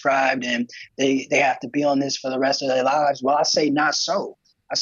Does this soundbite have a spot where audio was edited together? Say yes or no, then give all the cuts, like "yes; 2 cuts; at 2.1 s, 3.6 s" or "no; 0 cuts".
no; 0 cuts